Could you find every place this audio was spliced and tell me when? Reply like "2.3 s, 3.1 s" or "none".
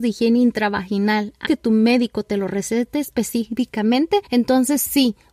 1.4 s, 4.3 s